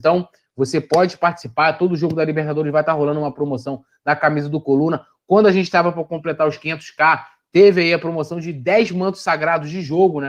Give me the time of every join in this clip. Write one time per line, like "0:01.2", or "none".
none